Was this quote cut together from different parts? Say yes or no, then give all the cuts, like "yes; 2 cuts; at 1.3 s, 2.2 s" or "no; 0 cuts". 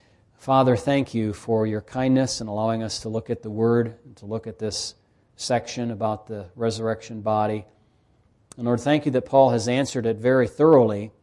no; 0 cuts